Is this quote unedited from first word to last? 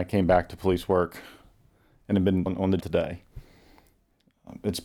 no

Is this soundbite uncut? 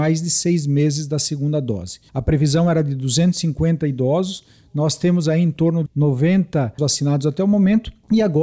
no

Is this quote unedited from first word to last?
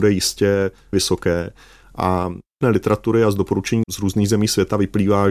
no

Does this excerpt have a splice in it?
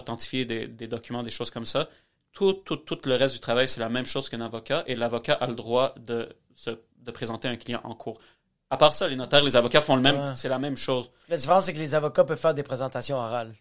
no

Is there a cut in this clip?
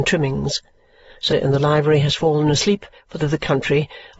yes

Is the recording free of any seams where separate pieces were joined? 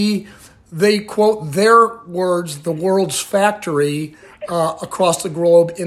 yes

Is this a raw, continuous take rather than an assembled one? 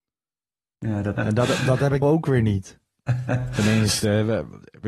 no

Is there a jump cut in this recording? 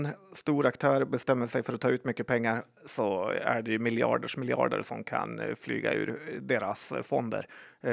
no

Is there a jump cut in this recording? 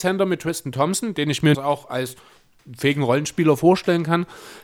yes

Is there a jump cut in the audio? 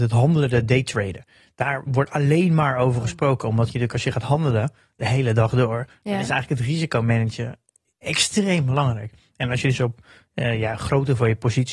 no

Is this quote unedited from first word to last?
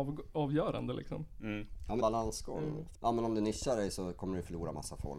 no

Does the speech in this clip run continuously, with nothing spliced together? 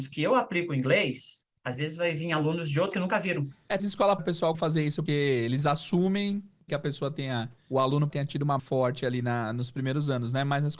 no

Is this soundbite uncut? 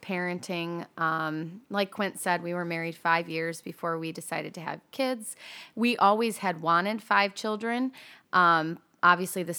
yes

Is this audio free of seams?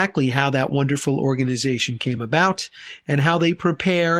yes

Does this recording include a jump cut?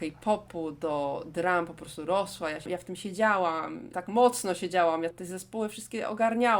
yes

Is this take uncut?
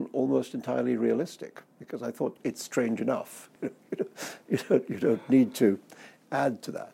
no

